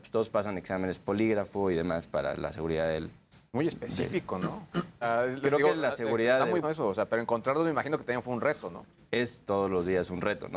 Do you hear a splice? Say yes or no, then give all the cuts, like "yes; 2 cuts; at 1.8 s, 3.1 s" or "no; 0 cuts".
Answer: yes; 3 cuts; at 1.0 s, 5.0 s, 6.6 s